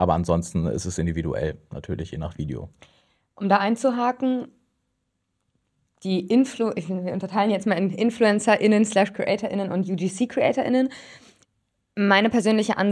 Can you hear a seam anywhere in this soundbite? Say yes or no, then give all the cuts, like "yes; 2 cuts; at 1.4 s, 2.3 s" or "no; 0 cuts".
no; 0 cuts